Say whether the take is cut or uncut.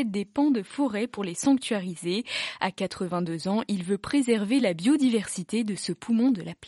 uncut